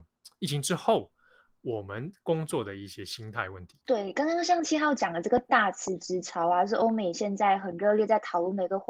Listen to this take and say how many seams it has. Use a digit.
1